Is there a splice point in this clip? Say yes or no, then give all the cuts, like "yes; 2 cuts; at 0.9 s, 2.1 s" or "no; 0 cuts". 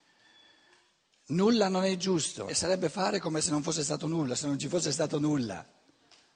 yes; 1 cut; at 2.5 s